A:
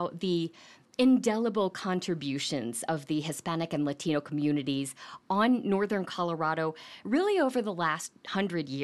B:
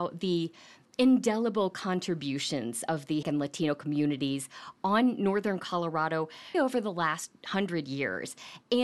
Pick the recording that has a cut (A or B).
B